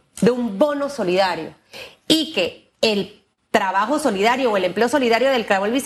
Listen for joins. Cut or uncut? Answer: uncut